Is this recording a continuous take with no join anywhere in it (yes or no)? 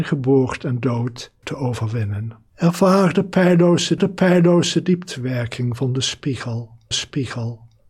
no